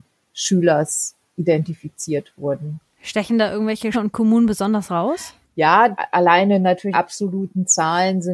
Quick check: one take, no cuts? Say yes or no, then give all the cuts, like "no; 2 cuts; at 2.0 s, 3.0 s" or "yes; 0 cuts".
no; 3 cuts; at 3.9 s, 5.4 s, 6.9 s